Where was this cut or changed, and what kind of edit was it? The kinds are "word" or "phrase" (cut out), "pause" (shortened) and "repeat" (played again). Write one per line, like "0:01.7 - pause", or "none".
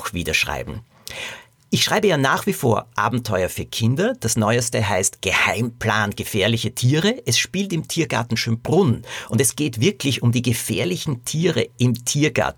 none